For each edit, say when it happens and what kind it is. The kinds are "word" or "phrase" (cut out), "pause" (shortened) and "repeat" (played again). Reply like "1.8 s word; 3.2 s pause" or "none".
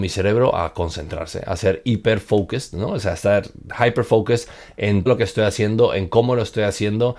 5.1 s word